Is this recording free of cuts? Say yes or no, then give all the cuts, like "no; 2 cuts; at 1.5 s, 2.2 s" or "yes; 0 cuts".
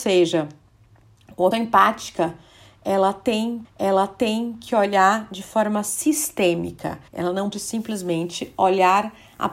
no; 4 cuts; at 1.5 s, 3.6 s, 7.1 s, 7.5 s